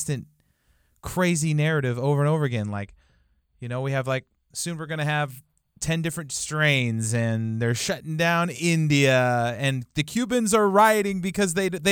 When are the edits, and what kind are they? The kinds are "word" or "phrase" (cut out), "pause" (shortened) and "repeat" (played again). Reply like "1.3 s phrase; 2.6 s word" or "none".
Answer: none